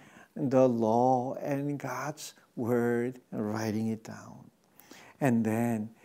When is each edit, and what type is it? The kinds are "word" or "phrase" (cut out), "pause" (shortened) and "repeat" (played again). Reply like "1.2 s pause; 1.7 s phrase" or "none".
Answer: 3.2 s pause